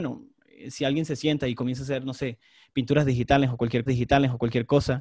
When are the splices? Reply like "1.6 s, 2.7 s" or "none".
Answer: 3.9 s

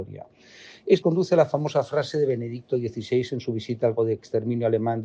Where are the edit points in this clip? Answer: 1.0 s, 4.0 s

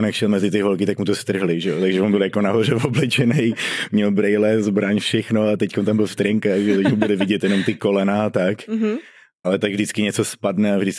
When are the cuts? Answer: none

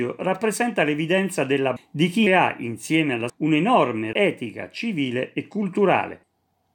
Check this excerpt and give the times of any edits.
1.8 s, 2.3 s, 3.3 s, 4.1 s

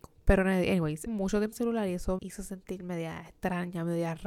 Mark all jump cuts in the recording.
1.1 s, 1.5 s, 2.2 s

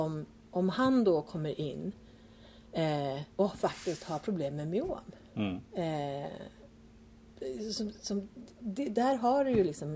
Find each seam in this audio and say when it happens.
3.3 s, 5.7 s

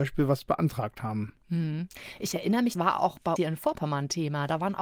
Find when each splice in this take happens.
2.7 s, 3.4 s

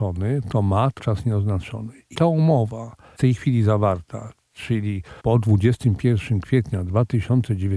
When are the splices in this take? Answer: 1.0 s, 2.1 s, 3.2 s, 5.2 s

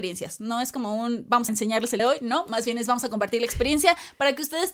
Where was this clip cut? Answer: 1.5 s, 2.0 s

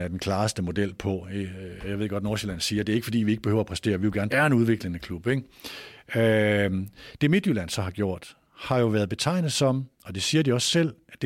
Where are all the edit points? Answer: 4.3 s, 8.4 s, 9.9 s

